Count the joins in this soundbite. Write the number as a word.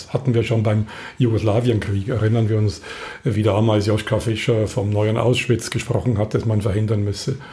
zero